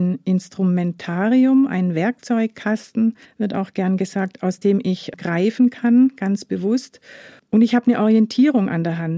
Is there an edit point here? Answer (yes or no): no